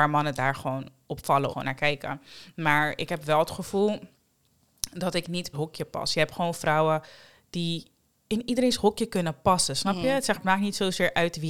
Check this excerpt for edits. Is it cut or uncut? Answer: cut